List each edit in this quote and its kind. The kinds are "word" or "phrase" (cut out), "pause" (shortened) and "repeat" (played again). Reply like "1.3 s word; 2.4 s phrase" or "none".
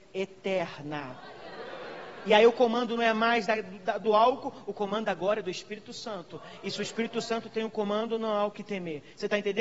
none